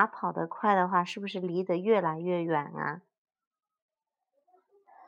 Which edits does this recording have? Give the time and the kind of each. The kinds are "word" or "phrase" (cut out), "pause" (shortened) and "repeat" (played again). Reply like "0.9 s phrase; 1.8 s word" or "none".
none